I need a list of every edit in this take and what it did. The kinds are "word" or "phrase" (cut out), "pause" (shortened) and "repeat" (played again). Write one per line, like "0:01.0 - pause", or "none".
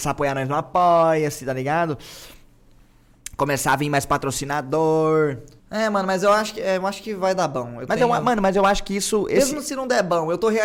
0:05.6 - pause

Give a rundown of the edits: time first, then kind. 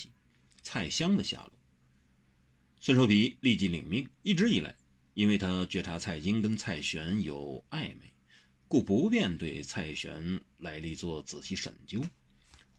0:04.1 - pause

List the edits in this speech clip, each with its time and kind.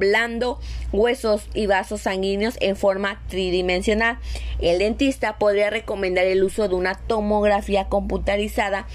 0:01.5 - word

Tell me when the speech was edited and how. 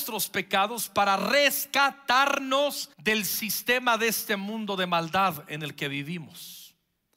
0:02.9 - pause

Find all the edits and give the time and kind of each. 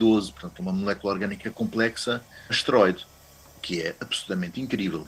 0:02.5 - word

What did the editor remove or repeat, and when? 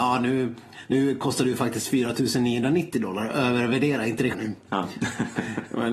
0:04.3 - word

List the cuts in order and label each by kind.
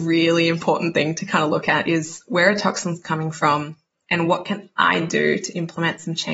none

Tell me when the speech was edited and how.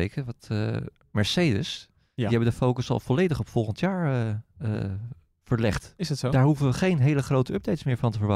none

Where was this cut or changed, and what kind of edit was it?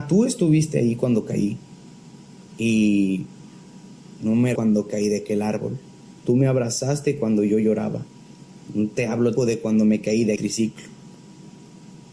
0:02.5 - pause
0:04.6 - word
0:06.2 - pause
0:08.6 - pause
0:09.4 - word
0:10.4 - word

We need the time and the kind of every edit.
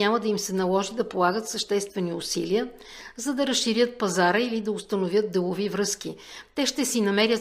none

